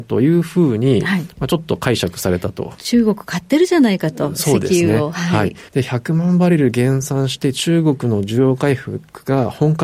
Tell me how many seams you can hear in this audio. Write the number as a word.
one